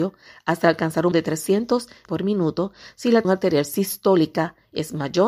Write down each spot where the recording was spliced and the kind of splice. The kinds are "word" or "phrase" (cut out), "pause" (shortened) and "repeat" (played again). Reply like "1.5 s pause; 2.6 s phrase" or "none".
1.1 s word; 2.1 s word; 3.2 s word